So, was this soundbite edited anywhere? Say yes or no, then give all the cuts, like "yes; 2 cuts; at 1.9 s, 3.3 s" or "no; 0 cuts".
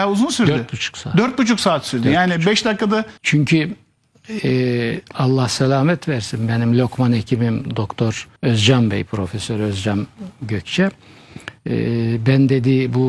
yes; 3 cuts; at 3.2 s, 8.4 s, 11.6 s